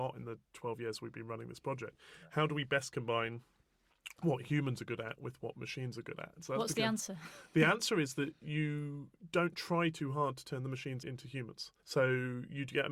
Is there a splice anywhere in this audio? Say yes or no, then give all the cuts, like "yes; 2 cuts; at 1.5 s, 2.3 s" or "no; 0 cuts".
yes; 2 cuts; at 11.0 s, 11.8 s